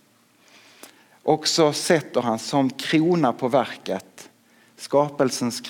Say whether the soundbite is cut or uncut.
uncut